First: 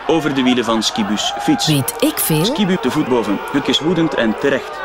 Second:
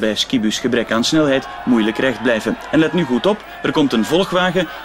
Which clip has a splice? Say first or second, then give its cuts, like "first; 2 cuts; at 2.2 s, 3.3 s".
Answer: first; 3 cuts; at 2.8 s, 3.1 s, 3.6 s